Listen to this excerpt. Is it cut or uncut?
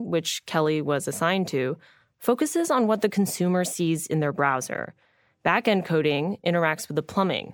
uncut